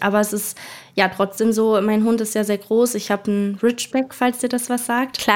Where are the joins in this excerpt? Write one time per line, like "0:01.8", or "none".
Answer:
none